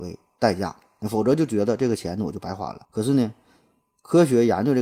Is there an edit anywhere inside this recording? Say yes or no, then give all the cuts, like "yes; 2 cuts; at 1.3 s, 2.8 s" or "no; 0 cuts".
yes; 1 cut; at 2.8 s